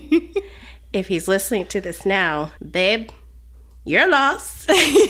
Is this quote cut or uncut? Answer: cut